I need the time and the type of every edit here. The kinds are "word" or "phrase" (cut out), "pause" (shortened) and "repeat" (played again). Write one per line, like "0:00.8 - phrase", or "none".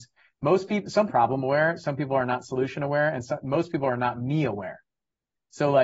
0:01.1 - phrase

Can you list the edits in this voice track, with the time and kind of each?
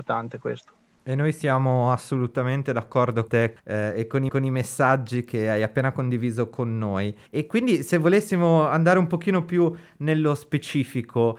0:03.3 - word
0:03.6 - pause
0:04.3 - repeat
0:07.3 - pause

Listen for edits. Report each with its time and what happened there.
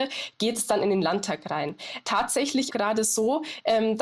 0:02.7 - phrase

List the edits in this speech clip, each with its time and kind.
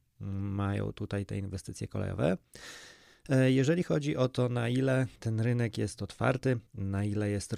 0:05.2 - pause
0:06.7 - pause

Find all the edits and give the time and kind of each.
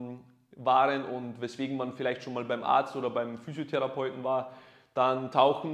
none

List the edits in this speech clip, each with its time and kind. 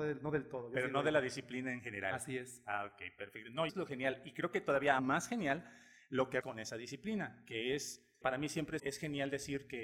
0:03.7 - word
0:05.0 - word
0:06.4 - word
0:08.2 - word
0:08.8 - word

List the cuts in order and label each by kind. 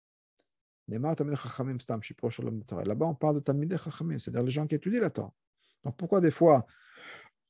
none

